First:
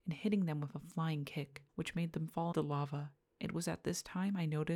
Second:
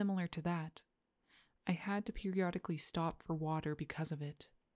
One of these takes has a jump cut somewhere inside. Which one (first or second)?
first